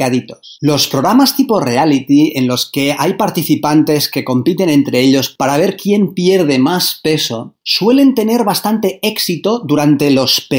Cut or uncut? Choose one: uncut